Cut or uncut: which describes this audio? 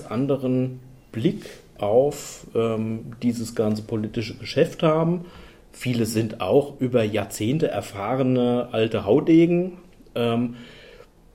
uncut